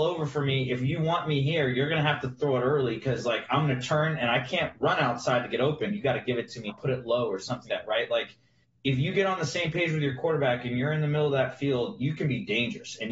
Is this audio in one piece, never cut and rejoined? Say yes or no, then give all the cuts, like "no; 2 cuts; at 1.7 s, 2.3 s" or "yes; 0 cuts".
no; 3 cuts; at 6.7 s, 7.7 s, 8.6 s